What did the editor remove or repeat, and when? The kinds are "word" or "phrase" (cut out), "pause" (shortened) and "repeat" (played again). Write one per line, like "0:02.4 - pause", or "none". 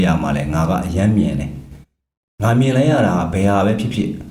0:01.8 - pause

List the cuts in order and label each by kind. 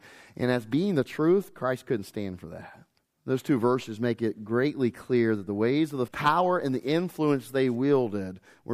0:03.0 - pause
0:06.1 - phrase

